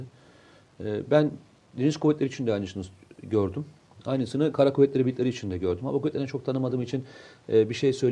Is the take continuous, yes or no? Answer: yes